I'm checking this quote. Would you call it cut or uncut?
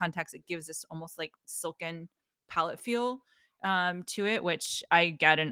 uncut